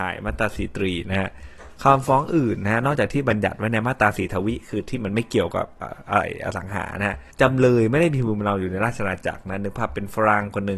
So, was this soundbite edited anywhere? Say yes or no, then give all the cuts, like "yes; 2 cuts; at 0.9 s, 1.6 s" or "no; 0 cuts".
yes; 1 cut; at 7.3 s